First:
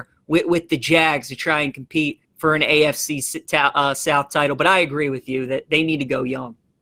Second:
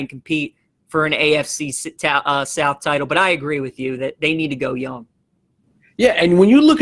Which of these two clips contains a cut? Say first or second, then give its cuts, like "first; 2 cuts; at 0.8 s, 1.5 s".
first; 1 cut; at 2.2 s